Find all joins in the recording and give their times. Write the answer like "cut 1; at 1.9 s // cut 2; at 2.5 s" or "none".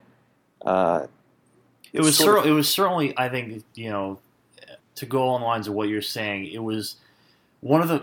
cut 1; at 4.8 s